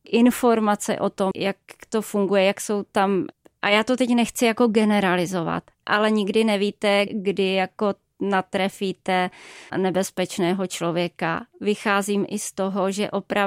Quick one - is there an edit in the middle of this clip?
yes; 4 cuts; at 1.3 s, 5.8 s, 7.1 s, 9.7 s

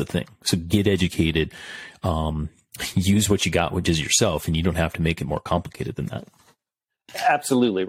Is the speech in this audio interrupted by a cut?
no; 0 cuts

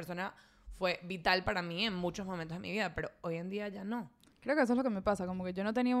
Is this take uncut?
yes; 0 cuts

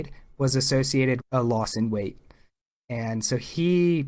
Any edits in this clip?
yes; 1 cut; at 1.2 s

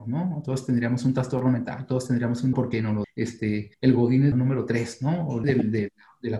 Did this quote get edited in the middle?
yes; 5 cuts; at 2.5 s, 3.0 s, 3.7 s, 4.3 s, 5.4 s

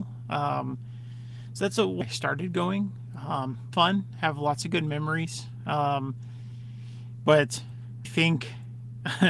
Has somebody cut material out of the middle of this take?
yes; 3 cuts; at 2.0 s, 3.7 s, 8.0 s

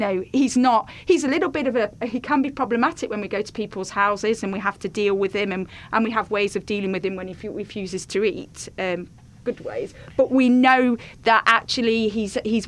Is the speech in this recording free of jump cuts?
yes; 0 cuts

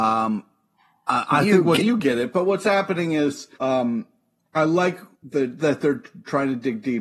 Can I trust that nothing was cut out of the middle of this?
no; 3 cuts; at 1.8 s, 3.5 s, 5.1 s

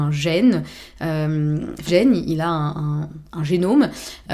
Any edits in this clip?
yes; 1 cut; at 1.9 s

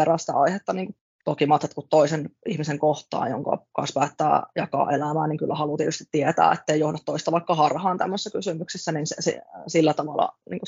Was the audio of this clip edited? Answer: no; 0 cuts

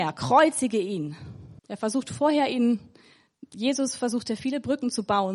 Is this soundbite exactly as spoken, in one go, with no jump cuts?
no; 1 cut; at 1.6 s

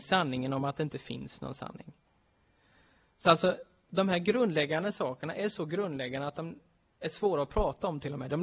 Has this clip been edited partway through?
no; 0 cuts

